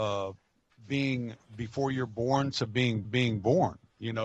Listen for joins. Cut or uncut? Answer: cut